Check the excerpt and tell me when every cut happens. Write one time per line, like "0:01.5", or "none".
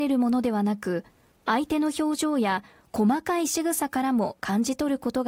none